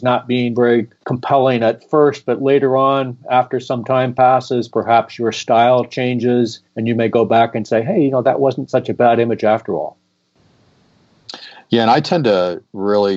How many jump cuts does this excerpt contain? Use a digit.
2